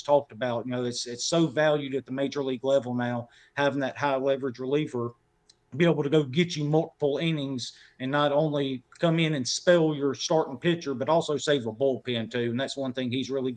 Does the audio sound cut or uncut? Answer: uncut